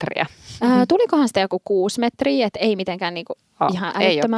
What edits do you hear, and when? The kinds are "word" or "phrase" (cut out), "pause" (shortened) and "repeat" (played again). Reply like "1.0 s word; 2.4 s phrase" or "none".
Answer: none